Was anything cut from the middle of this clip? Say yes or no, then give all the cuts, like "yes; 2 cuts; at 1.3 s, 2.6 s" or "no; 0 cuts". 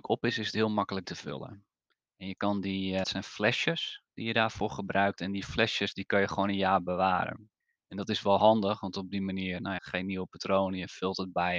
yes; 4 cuts; at 1.0 s, 3.0 s, 7.6 s, 9.8 s